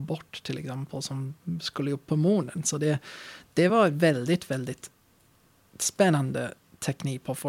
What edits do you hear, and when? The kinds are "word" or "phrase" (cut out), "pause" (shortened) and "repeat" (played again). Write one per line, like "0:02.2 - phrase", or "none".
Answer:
none